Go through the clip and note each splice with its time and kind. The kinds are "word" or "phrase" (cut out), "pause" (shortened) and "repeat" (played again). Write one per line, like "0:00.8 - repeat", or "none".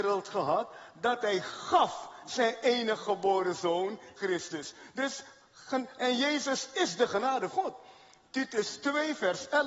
0:04.2 - word
0:07.5 - word